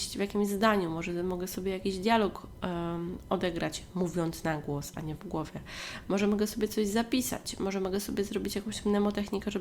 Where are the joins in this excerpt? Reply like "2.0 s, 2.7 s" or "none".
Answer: none